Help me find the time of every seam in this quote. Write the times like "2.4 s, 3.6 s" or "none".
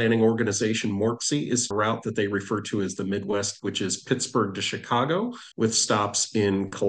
1.7 s, 3.6 s, 5.5 s

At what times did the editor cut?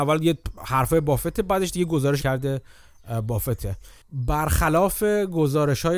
2.2 s

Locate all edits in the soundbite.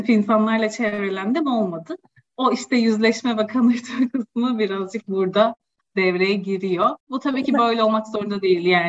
7.0 s

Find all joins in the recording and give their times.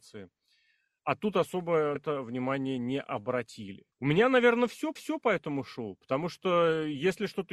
2.0 s, 3.9 s, 5.0 s

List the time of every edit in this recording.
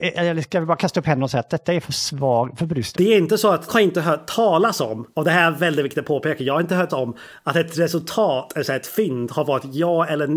2.9 s, 3.7 s, 5.1 s, 6.9 s

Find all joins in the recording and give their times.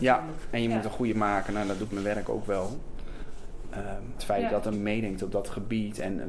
1.1 s, 1.9 s, 4.2 s, 4.7 s

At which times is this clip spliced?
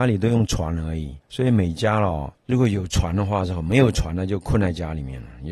1.2 s, 2.4 s

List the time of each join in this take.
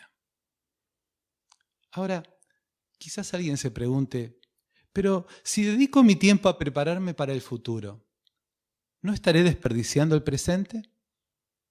4.6 s

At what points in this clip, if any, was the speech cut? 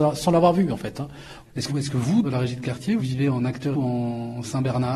1.7 s, 2.2 s, 3.0 s, 3.7 s

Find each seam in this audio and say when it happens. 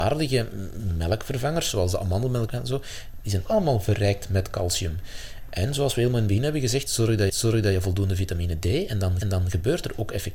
2.5 s, 3.5 s, 7.3 s, 9.2 s

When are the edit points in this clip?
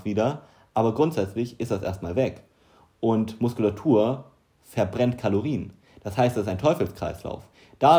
none

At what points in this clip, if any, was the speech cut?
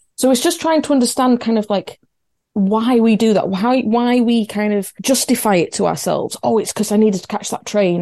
none

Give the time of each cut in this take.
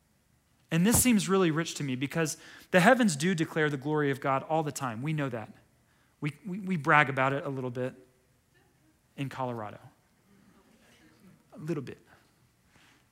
none

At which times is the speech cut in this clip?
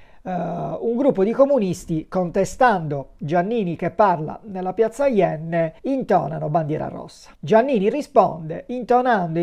5.8 s, 7.3 s

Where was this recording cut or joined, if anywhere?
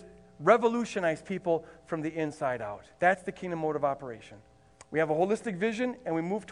2.9 s, 4.7 s

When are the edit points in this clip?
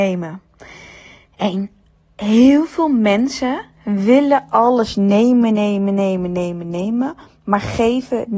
none

